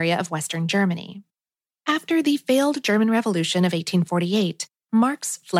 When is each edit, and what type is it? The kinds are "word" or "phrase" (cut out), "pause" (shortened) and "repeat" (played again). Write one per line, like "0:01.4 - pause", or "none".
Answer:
none